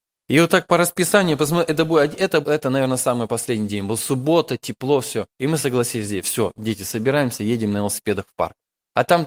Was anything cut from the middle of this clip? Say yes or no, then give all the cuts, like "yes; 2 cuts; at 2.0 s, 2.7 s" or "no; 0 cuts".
yes; 2 cuts; at 2.4 s, 5.3 s